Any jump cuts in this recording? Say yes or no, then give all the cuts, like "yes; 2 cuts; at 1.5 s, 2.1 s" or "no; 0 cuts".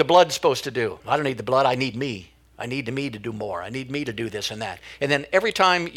yes; 1 cut; at 1.0 s